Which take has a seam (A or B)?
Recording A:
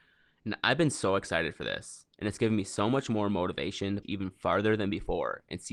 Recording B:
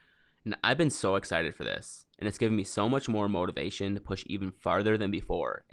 A